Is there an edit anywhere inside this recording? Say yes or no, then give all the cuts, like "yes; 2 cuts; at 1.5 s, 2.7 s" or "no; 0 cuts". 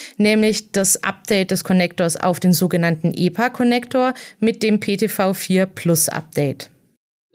no; 0 cuts